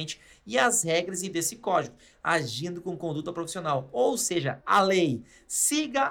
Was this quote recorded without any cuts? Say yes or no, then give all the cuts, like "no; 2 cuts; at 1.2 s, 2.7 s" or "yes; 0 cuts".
no; 2 cuts; at 1.3 s, 4.6 s